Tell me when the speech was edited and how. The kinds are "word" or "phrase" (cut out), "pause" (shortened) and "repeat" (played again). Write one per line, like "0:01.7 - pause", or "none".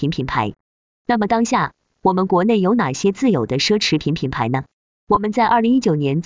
none